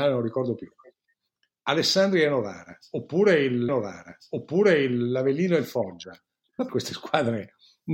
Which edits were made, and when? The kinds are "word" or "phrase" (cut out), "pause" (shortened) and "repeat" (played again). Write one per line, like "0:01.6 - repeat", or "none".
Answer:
0:03.7 - repeat
0:06.7 - word